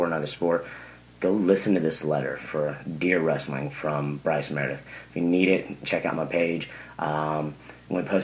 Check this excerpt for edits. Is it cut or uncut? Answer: uncut